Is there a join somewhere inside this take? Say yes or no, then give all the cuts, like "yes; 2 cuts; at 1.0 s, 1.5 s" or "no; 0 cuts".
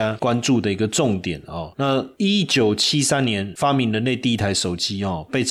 no; 0 cuts